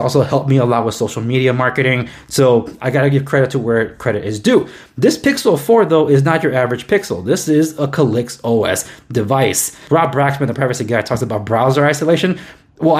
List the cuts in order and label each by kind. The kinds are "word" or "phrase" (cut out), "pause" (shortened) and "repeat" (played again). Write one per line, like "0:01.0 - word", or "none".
none